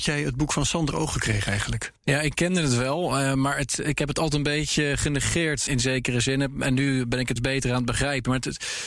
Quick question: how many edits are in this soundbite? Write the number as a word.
four